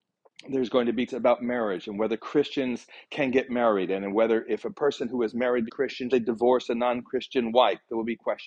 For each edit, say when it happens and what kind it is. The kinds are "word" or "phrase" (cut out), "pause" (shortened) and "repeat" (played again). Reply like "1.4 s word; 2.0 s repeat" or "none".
1.1 s word; 5.7 s word; 6.1 s word